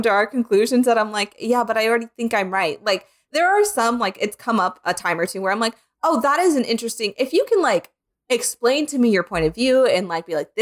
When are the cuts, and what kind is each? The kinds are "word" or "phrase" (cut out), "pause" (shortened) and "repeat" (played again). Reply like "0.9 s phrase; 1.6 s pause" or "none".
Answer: none